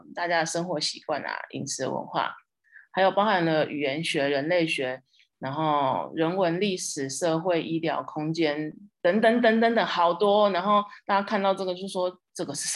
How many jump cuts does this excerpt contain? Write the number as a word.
zero